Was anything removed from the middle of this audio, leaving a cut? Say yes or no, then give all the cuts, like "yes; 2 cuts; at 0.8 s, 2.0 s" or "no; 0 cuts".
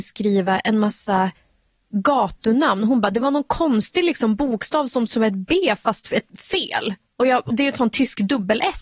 yes; 2 cuts; at 5.1 s, 7.5 s